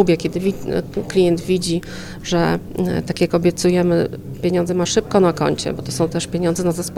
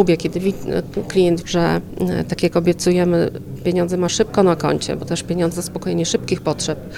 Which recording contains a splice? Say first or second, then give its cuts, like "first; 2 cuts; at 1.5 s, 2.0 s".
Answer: second; 3 cuts; at 1.4 s, 5.1 s, 5.5 s